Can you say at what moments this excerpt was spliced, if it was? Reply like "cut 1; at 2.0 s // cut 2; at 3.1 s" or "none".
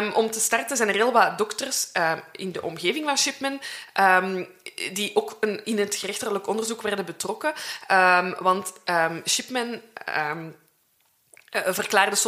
cut 1; at 5.6 s